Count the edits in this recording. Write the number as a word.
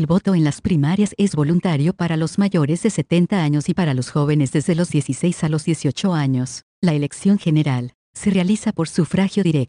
zero